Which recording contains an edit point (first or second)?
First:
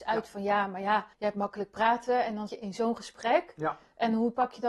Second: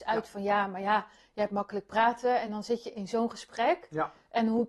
first